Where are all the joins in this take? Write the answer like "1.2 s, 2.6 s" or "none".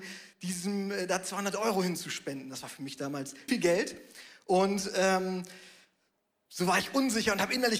3.5 s